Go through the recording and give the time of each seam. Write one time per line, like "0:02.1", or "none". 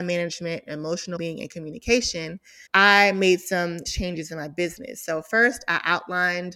0:01.2
0:02.7
0:03.9